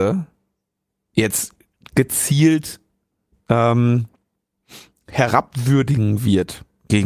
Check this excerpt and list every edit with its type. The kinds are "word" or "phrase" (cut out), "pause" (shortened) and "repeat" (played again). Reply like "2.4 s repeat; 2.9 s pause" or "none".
none